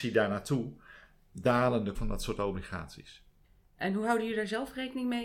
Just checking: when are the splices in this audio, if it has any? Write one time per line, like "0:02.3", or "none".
0:01.9